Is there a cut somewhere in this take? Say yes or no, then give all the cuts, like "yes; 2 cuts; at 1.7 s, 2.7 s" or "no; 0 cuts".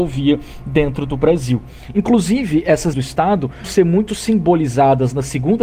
yes; 2 cuts; at 2.9 s, 3.6 s